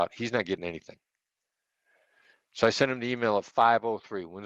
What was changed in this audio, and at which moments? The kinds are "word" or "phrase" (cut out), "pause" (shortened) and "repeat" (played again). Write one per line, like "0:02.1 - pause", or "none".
none

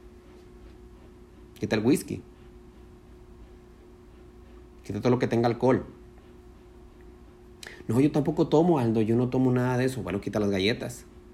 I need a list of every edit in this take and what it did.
none

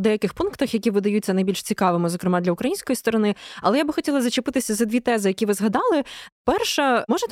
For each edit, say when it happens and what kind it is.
none

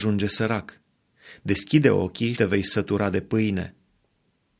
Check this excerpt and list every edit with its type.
0:02.3 - word

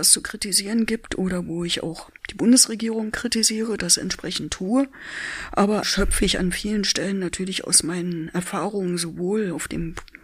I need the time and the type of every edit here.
0:02.2 - pause
0:05.8 - word

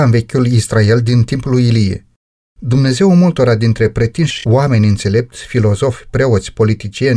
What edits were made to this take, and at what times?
none

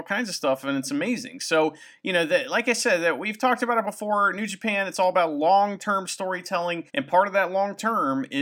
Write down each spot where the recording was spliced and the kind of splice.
0:06.9 - pause

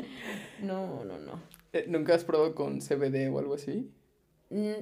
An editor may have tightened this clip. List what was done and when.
none

